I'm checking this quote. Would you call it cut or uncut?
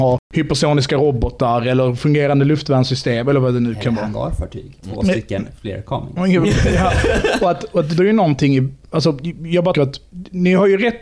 cut